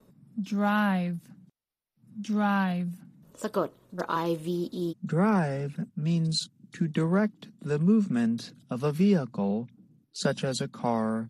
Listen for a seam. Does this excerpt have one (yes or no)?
yes